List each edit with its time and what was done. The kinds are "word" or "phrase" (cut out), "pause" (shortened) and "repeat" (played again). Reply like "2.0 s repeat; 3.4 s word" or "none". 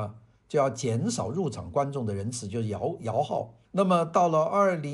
3.6 s pause